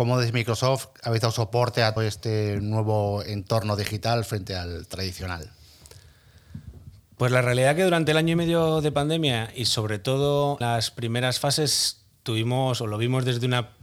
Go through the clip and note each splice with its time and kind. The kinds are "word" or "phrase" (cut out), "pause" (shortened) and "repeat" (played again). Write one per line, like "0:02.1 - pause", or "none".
0:02.0 - word
0:10.6 - word